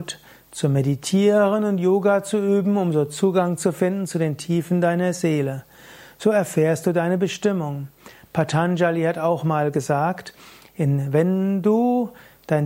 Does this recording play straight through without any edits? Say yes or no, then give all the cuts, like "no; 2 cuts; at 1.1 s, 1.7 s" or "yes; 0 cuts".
yes; 0 cuts